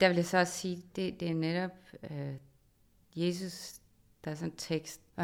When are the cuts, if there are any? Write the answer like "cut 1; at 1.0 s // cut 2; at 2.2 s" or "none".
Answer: none